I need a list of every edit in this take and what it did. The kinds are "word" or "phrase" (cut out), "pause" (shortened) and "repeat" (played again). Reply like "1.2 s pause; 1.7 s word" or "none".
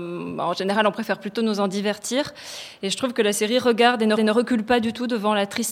4.2 s repeat